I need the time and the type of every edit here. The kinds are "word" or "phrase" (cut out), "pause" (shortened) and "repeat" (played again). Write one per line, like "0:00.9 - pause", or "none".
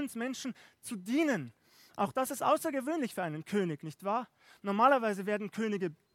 none